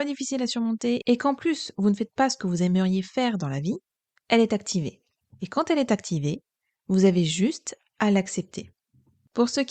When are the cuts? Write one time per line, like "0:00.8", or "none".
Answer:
none